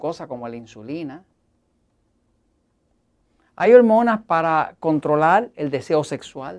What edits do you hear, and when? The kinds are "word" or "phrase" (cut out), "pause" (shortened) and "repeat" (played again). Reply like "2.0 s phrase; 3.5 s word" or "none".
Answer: none